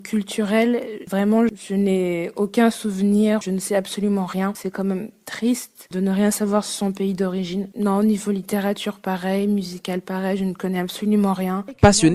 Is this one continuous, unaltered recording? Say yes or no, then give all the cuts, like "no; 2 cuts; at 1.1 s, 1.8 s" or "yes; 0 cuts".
yes; 0 cuts